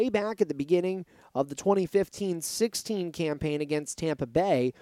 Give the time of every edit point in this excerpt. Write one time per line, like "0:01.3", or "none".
none